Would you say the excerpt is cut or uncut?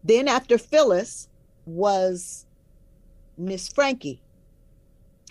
cut